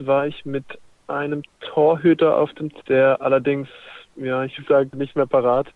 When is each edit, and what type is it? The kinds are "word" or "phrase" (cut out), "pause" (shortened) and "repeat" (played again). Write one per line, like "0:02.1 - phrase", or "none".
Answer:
0:02.8 - word
0:04.1 - pause
0:04.6 - phrase